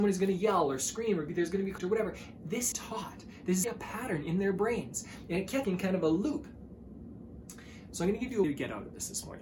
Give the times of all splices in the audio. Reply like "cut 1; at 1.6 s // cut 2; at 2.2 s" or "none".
cut 1; at 1.8 s // cut 2; at 2.7 s // cut 3; at 3.6 s // cut 4; at 5.6 s // cut 5; at 8.4 s